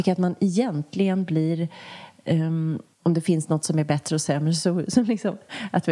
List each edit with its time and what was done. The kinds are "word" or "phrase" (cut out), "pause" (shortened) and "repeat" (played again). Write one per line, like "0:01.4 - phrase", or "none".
0:02.9 - pause